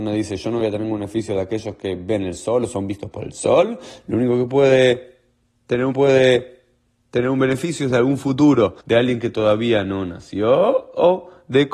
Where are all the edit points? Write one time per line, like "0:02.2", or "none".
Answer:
0:05.9
0:08.8